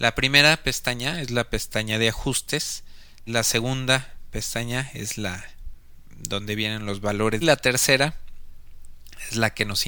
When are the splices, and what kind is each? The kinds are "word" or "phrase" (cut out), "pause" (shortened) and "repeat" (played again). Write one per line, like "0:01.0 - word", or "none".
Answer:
0:03.3 - word
0:07.4 - phrase